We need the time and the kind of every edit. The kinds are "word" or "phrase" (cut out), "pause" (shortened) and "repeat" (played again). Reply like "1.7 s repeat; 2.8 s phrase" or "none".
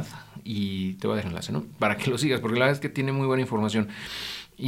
1.2 s word

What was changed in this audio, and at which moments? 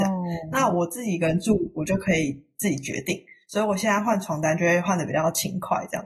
none

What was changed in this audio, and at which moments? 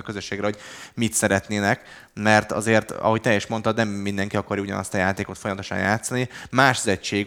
none

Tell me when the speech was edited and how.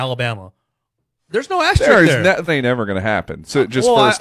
2.5 s phrase

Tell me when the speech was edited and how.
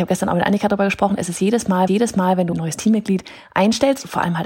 1.9 s repeat; 2.5 s word

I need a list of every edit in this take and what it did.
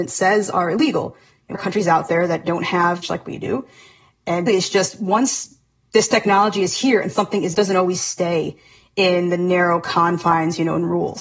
1.5 s phrase; 3.0 s phrase; 4.5 s word; 7.5 s phrase

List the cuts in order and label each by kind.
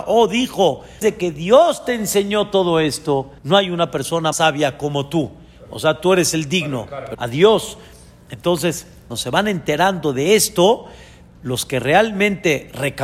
1.0 s word; 3.4 s pause; 4.3 s word; 7.1 s phrase; 9.1 s phrase

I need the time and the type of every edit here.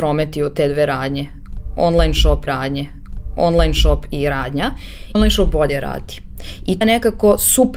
2.5 s repeat; 5.1 s phrase; 6.8 s word

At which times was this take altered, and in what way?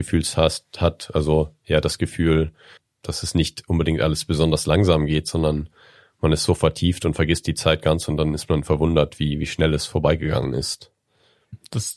none

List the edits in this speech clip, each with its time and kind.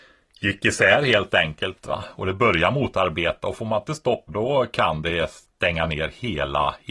4.3 s phrase

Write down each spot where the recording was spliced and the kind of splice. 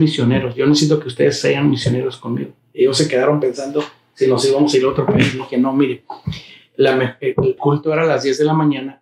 7.6 s word

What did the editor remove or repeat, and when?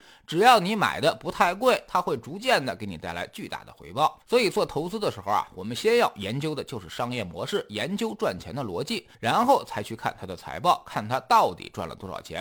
4.2 s pause; 9.1 s pause

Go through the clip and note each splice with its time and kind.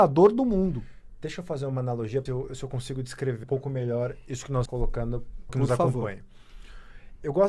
2.3 s phrase; 3.4 s word; 4.7 s word; 5.5 s phrase

